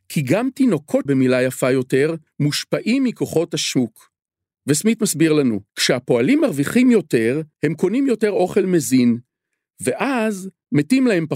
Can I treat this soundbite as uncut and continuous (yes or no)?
no